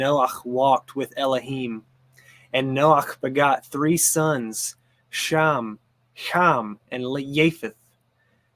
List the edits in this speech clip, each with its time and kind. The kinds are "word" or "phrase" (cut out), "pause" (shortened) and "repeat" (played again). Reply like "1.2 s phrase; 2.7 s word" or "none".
none